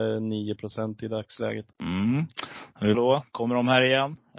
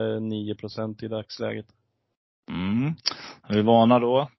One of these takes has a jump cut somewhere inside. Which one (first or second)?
first